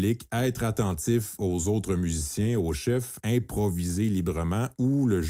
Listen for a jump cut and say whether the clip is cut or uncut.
cut